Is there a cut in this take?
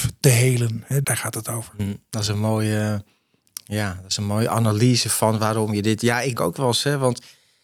yes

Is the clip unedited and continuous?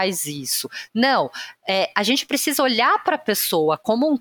yes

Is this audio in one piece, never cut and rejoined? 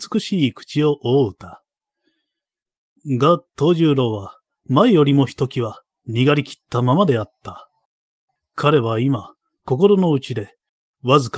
yes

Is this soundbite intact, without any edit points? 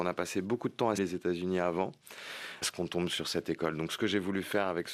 no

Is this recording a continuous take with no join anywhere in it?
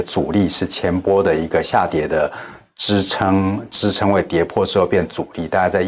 yes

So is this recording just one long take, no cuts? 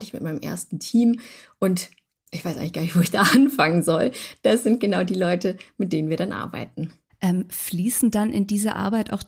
no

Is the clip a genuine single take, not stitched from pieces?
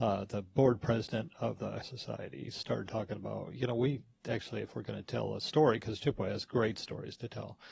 no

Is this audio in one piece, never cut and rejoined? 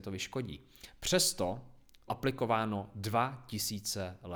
no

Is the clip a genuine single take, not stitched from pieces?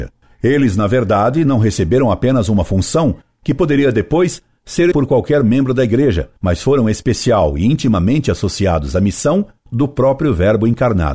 no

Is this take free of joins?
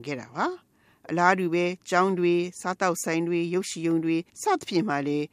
no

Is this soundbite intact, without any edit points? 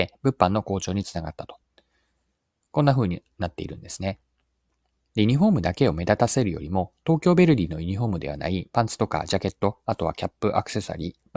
yes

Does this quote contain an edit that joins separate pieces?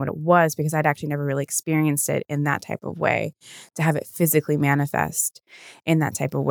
no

